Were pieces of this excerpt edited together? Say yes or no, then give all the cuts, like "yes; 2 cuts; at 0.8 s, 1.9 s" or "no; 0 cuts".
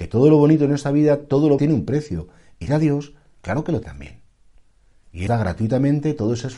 yes; 4 cuts; at 1.6 s, 2.7 s, 3.8 s, 5.3 s